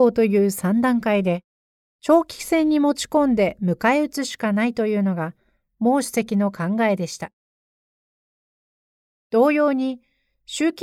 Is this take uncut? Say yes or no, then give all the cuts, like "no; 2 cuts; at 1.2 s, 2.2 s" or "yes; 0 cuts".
yes; 0 cuts